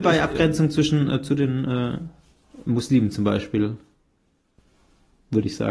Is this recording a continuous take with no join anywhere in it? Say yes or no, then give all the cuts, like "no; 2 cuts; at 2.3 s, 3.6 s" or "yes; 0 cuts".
yes; 0 cuts